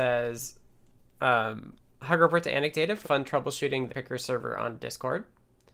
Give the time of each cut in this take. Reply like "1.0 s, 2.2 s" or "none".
3.0 s, 3.9 s